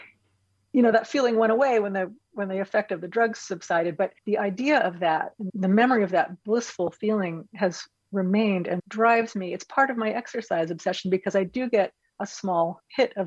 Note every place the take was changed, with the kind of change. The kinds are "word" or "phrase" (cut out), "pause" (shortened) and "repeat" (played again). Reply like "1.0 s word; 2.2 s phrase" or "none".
4.2 s pause; 5.5 s word; 8.8 s word

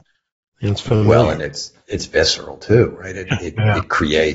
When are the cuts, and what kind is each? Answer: none

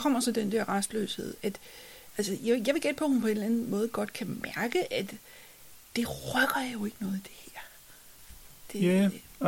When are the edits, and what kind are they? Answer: 1.4 s word

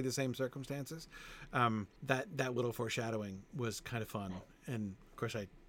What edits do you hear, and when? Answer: 2.0 s pause

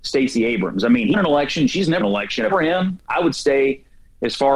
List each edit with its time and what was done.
1.1 s word; 2.0 s word; 2.5 s word

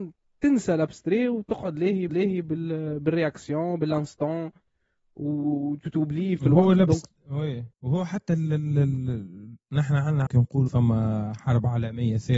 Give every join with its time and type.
2.1 s repeat; 6.4 s word; 7.7 s pause; 9.6 s pause; 10.3 s phrase; 10.7 s word

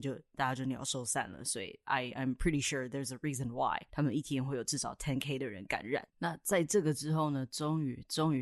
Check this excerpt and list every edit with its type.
3.9 s pause

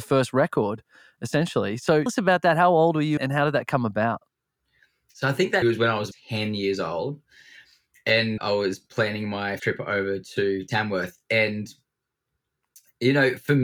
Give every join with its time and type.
2.1 s word; 3.2 s word; 5.6 s word; 6.1 s word; 8.4 s word; 9.6 s word

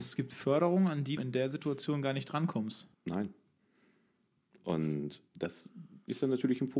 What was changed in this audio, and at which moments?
1.2 s word; 2.9 s pause; 5.3 s pause

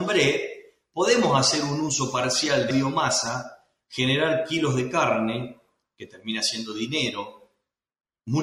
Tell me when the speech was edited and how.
2.7 s word

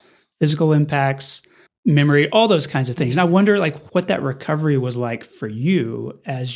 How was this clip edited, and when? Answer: 1.7 s word; 3.9 s word

